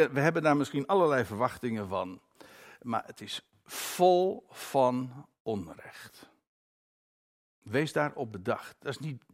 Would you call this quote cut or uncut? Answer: uncut